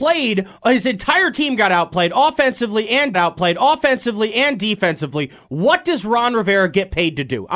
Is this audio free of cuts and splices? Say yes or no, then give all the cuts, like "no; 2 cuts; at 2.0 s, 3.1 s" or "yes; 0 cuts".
no; 1 cut; at 3.1 s